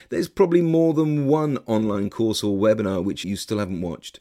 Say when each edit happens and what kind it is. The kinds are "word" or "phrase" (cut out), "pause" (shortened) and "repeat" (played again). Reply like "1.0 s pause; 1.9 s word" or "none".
3.2 s phrase